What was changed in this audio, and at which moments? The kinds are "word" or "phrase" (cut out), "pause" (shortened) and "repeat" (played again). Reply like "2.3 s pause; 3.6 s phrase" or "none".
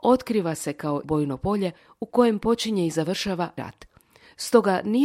1.0 s word; 3.6 s word

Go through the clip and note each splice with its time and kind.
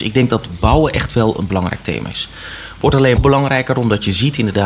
3.2 s phrase

